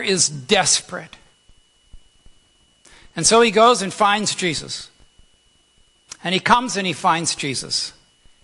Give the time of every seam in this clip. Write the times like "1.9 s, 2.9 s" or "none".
none